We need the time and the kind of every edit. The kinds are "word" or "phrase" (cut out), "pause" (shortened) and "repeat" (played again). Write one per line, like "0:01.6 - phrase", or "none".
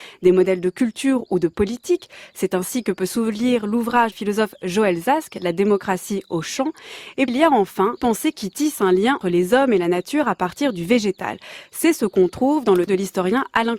0:04.1 - phrase
0:07.3 - word
0:08.0 - word
0:09.2 - word
0:12.9 - phrase